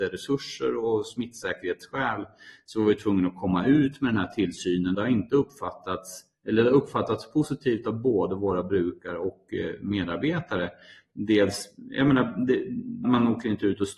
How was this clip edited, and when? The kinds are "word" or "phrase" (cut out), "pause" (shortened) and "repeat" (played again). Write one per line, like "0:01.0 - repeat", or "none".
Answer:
0:04.9 - word
0:13.0 - word